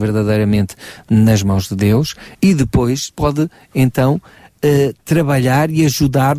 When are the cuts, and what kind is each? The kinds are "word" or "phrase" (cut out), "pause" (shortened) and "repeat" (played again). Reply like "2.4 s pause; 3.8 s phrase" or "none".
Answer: 2.3 s pause; 3.1 s word